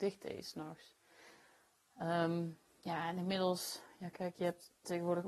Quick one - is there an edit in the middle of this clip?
no; 0 cuts

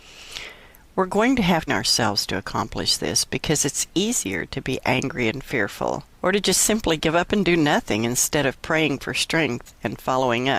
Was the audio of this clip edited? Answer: yes; 2 cuts; at 1.7 s, 6.1 s

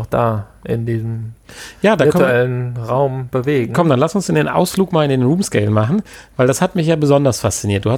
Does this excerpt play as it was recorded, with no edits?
yes; 0 cuts

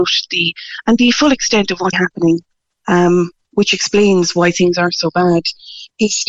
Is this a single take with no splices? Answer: no; 1 cut; at 1.9 s

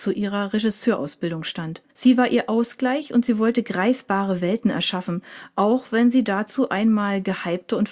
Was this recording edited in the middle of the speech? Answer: yes; 1 cut; at 1.9 s

